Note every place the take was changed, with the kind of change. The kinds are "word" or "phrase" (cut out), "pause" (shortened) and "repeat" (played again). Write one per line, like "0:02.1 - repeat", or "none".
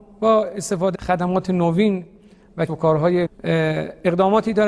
0:00.9 - word
0:02.7 - word
0:03.3 - word